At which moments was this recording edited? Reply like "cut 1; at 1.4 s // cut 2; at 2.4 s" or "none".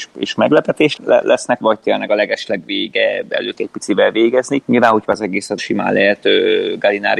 cut 1; at 1.0 s // cut 2; at 1.6 s // cut 3; at 3.6 s // cut 4; at 5.0 s // cut 5; at 5.6 s